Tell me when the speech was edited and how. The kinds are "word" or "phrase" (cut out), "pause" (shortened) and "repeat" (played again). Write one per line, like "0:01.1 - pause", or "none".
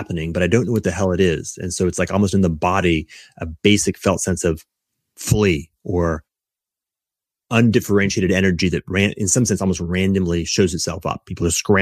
none